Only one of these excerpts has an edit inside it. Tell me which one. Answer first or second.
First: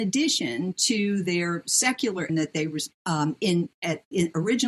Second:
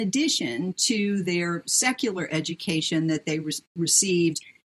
first